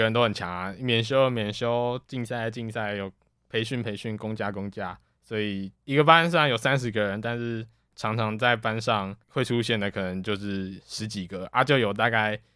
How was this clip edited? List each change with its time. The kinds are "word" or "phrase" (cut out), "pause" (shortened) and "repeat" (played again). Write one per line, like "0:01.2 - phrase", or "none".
0:05.8 - pause
0:09.2 - pause